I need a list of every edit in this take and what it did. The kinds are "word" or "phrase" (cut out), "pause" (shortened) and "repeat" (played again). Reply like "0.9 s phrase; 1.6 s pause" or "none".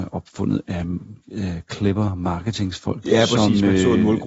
1.2 s pause